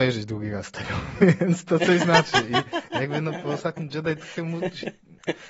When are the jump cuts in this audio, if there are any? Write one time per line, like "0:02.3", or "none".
none